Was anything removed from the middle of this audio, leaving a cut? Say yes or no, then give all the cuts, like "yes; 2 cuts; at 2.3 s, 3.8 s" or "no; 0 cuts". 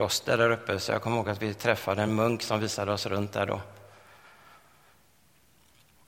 no; 0 cuts